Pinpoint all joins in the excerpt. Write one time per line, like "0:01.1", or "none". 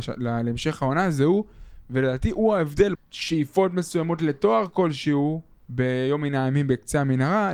0:02.9